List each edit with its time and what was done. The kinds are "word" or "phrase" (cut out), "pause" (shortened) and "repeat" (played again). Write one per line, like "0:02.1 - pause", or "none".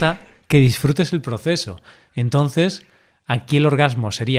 none